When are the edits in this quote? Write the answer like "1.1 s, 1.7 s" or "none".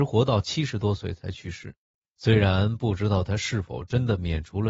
2.0 s